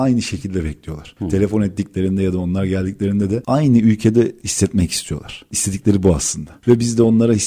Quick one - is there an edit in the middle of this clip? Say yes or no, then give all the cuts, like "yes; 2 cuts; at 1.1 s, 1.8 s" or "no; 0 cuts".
no; 0 cuts